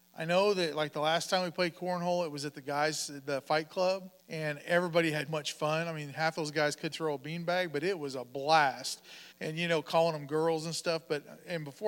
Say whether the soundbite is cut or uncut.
cut